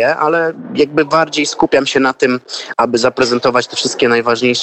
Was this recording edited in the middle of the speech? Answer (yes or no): no